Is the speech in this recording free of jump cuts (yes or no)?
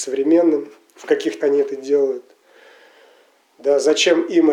no